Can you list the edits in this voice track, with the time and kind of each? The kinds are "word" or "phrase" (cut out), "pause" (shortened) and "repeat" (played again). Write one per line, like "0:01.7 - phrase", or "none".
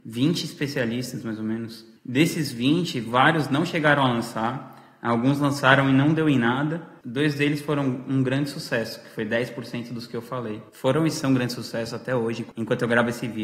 0:02.0 - pause
0:10.7 - pause